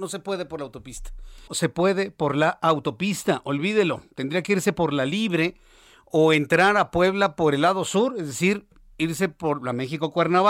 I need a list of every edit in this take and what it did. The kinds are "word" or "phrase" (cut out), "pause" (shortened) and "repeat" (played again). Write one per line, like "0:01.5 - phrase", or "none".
0:01.5 - word